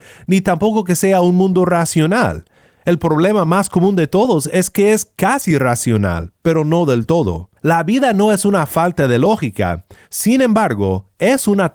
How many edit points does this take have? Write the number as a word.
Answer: one